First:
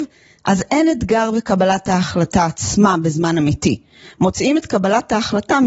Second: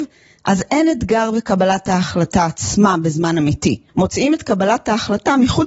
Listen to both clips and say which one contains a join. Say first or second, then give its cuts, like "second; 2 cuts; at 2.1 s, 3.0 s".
second; 1 cut; at 3.9 s